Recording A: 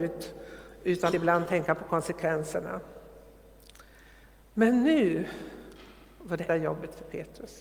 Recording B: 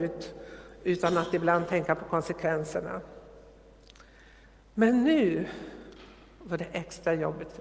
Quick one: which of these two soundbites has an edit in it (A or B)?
A